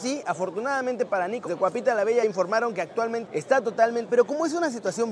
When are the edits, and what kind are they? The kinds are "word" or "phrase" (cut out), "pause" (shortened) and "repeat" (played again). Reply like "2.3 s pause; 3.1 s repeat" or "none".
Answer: 1.5 s word; 2.2 s word; 3.3 s phrase; 4.1 s word

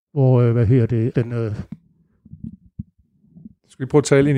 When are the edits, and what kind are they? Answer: 1.1 s word

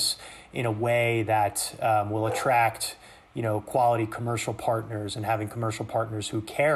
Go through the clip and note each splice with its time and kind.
none

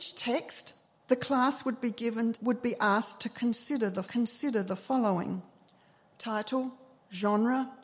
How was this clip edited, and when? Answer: 2.3 s word; 4.0 s repeat

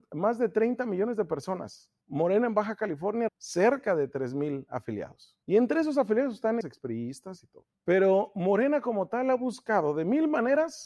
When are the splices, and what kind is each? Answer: 2.0 s pause; 3.3 s word; 5.4 s pause; 6.6 s word; 7.7 s pause

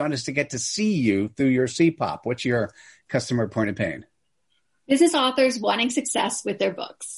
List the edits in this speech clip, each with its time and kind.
none

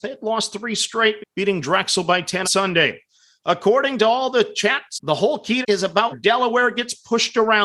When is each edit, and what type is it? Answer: 1.2 s word; 2.4 s word; 4.9 s phrase; 5.6 s word; 6.1 s word

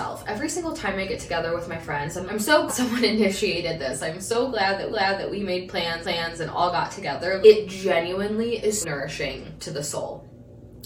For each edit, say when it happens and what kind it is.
2.3 s word; 2.7 s word; 4.9 s repeat; 6.0 s repeat; 7.4 s word; 8.8 s word

